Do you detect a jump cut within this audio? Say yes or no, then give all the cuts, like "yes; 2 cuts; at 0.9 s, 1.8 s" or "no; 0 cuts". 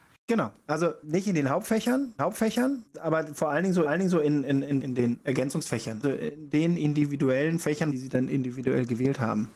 yes; 4 cuts; at 2.2 s, 3.9 s, 4.8 s, 6.0 s